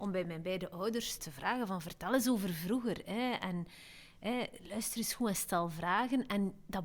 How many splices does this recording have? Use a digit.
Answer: 1